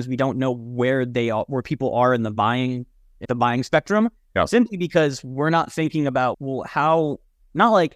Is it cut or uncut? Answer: cut